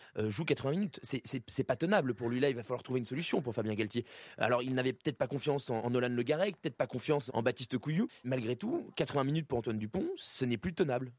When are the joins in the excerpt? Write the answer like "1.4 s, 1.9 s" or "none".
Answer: 5.8 s, 7.3 s, 8.2 s